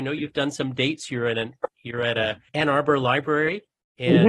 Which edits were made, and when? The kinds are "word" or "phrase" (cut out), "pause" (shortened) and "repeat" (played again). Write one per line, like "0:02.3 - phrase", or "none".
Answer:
0:02.5 - pause